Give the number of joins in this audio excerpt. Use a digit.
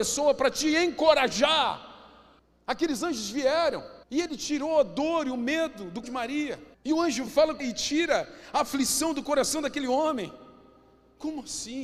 6